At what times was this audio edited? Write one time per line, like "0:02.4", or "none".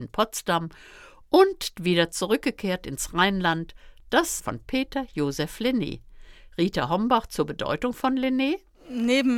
0:04.4